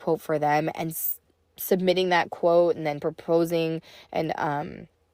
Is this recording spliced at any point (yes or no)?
yes